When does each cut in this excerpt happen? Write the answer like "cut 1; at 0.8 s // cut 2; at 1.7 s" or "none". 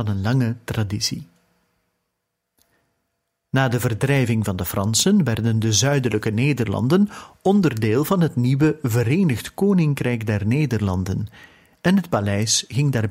none